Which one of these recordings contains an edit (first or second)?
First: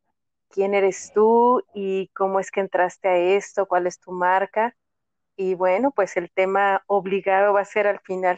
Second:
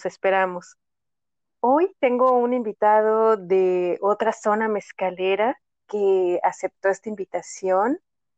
second